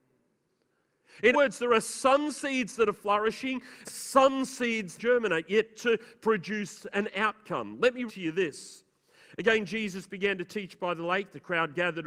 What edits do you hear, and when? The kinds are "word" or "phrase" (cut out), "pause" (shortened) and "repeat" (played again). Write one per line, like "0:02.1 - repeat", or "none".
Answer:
0:01.3 - word
0:03.8 - word
0:05.0 - phrase
0:08.1 - word

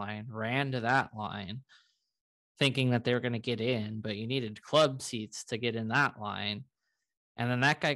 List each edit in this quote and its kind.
none

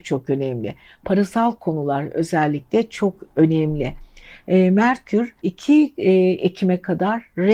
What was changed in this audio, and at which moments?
0:05.4 - pause

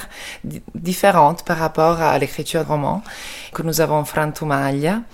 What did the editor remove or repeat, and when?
0:02.6 - word
0:03.5 - word

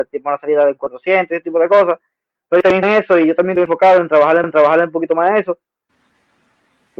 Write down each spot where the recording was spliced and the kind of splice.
0:02.8 - word
0:04.4 - repeat

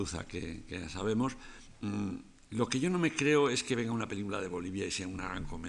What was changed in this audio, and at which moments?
none

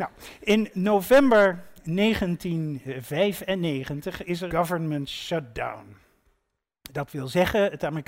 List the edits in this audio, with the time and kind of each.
0:04.5 - word

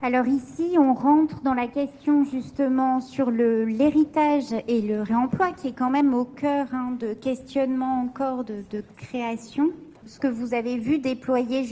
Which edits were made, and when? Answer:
0:10.0 - pause

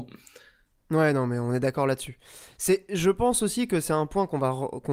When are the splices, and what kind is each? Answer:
none

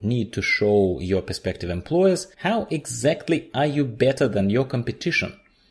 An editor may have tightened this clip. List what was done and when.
0:02.3 - pause

